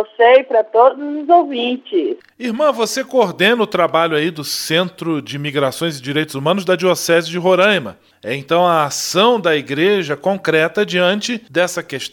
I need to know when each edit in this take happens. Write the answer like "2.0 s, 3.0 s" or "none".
none